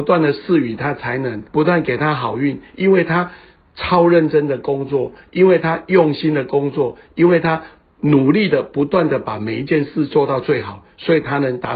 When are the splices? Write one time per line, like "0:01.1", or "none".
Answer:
0:01.5

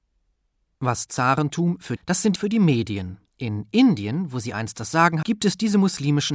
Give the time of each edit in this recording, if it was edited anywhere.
0:01.1
0:02.0
0:02.4
0:03.3
0:05.2

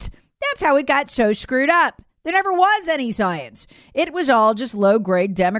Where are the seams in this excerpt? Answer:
none

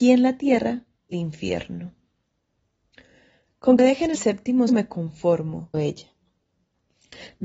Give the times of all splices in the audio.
0:01.1
0:03.8
0:04.1
0:04.7
0:05.7

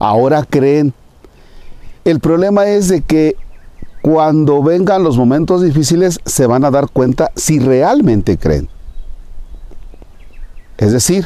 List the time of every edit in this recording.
0:02.0

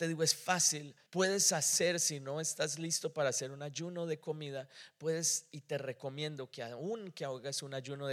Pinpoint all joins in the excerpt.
0:01.1

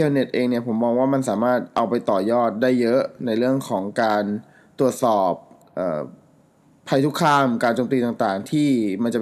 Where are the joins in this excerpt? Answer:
none

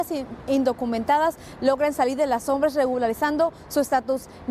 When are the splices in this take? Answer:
none

